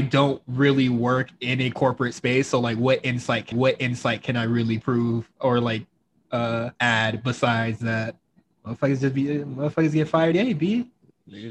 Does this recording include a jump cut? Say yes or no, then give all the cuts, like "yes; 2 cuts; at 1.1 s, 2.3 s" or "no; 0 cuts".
yes; 3 cuts; at 3.5 s, 6.8 s, 10.3 s